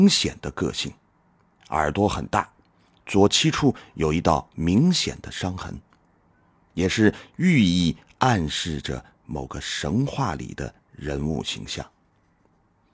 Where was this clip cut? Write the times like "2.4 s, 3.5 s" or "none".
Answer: none